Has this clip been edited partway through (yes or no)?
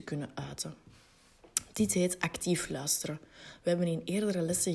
no